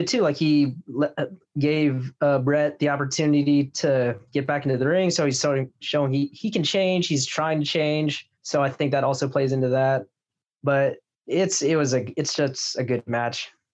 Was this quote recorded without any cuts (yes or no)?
no